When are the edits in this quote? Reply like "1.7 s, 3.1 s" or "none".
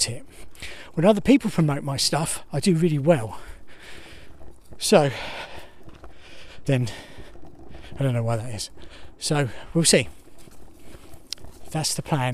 6.7 s